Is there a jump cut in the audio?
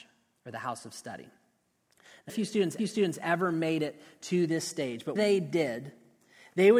yes; 3 cuts; at 2.3 s, 2.8 s, 5.2 s

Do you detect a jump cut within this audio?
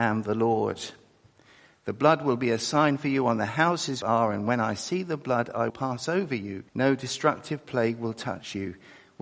yes; 3 cuts; at 4.0 s, 5.7 s, 6.7 s

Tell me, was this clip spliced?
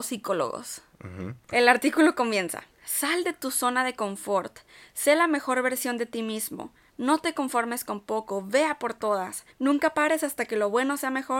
yes; 2 cuts; at 2.7 s, 9.5 s

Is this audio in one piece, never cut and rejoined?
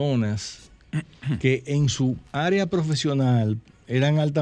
yes; 0 cuts

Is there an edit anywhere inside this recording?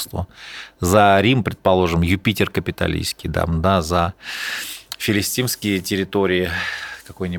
no; 0 cuts

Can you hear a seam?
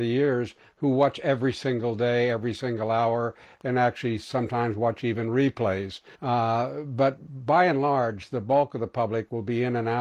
yes; 1 cut; at 6.2 s

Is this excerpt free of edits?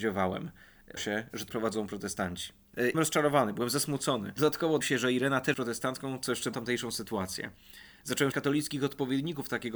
no; 7 cuts; at 1.0 s, 1.5 s, 2.9 s, 4.8 s, 5.5 s, 6.5 s, 8.3 s

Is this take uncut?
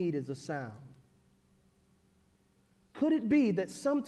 yes; 0 cuts

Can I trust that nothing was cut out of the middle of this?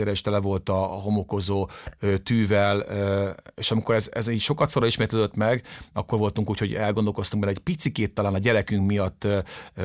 yes; 0 cuts

